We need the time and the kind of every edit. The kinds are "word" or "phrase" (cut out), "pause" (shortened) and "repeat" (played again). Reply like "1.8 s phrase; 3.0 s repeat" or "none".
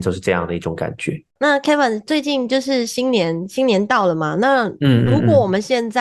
1.3 s pause